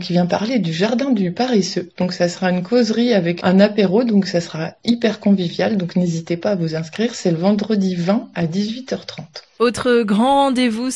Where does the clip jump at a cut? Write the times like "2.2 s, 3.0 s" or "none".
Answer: none